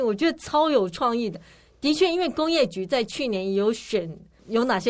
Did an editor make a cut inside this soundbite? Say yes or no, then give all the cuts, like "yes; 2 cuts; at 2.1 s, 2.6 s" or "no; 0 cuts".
no; 0 cuts